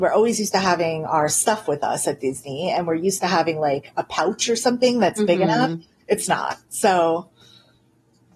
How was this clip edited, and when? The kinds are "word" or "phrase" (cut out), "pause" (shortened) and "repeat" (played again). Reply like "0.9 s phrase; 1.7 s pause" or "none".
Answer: none